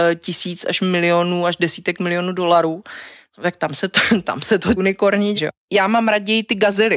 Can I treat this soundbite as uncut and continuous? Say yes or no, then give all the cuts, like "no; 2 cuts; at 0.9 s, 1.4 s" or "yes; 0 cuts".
no; 2 cuts; at 4.8 s, 5.4 s